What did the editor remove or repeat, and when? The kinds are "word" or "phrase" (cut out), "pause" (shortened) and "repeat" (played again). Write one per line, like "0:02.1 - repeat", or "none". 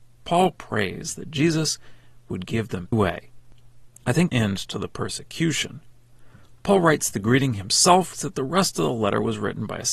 0:02.9 - phrase
0:04.3 - phrase
0:08.1 - phrase